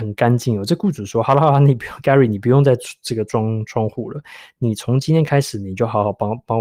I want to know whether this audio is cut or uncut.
uncut